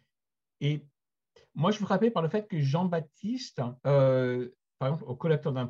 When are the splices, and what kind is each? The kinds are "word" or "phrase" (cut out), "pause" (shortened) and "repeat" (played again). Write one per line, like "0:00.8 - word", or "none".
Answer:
0:03.8 - pause